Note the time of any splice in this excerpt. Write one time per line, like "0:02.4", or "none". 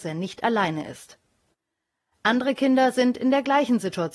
none